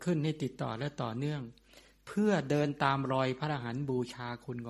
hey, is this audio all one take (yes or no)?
yes